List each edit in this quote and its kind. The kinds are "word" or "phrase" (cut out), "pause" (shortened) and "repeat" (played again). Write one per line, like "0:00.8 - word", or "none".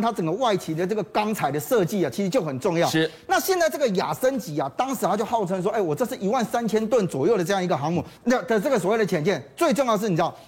0:08.2 - pause